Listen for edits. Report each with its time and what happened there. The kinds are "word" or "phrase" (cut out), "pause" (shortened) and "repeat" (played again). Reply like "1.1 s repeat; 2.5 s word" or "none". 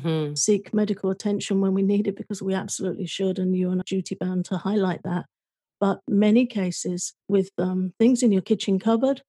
3.8 s phrase; 7.2 s pause